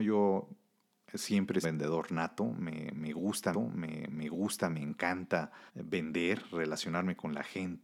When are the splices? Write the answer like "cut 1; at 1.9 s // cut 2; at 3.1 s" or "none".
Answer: cut 1; at 1.6 s // cut 2; at 3.5 s // cut 3; at 5.7 s